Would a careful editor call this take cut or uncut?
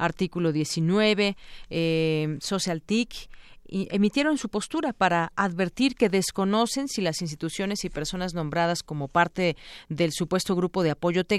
uncut